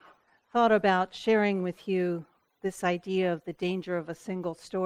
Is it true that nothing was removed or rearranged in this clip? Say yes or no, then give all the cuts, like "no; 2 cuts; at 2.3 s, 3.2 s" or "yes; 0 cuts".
yes; 0 cuts